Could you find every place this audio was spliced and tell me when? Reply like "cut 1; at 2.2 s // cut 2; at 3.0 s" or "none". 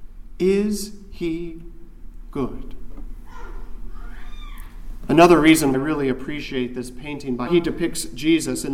cut 1; at 5.7 s // cut 2; at 7.5 s